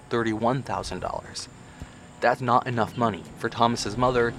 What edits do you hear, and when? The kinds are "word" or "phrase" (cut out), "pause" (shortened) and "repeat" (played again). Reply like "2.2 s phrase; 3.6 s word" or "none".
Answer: 2.4 s word